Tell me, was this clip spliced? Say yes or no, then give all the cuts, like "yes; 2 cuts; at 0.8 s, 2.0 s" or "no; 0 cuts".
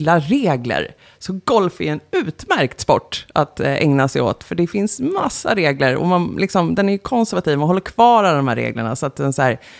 no; 0 cuts